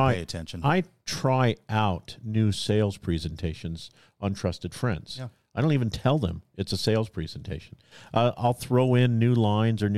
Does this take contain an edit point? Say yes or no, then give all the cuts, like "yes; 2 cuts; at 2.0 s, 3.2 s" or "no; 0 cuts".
no; 0 cuts